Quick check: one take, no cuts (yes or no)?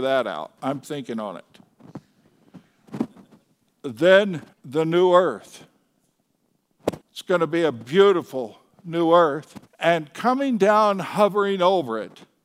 no